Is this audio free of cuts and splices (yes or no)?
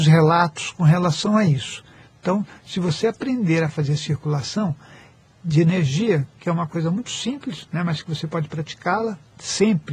yes